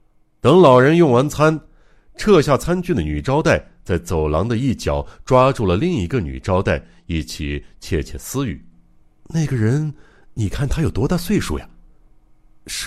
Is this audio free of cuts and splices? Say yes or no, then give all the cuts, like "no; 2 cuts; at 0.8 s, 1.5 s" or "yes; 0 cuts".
yes; 0 cuts